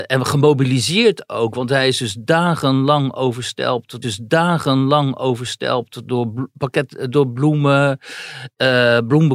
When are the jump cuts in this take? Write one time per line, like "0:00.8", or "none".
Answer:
0:04.0
0:07.1